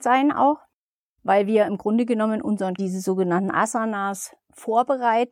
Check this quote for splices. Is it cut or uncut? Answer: cut